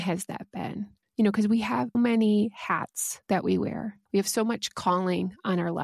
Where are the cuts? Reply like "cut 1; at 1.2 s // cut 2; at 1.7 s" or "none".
cut 1; at 1.9 s